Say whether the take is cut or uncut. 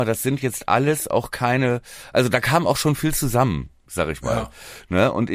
uncut